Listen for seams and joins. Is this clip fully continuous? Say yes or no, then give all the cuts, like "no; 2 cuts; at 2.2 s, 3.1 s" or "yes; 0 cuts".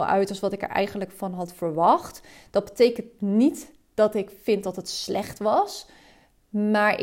yes; 0 cuts